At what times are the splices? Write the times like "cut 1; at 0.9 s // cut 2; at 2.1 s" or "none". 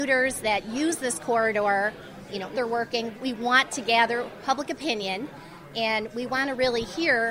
cut 1; at 2.5 s // cut 2; at 3.1 s